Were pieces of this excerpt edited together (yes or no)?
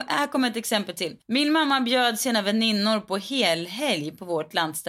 yes